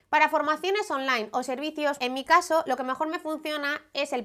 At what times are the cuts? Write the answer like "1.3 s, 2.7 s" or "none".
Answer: 2.0 s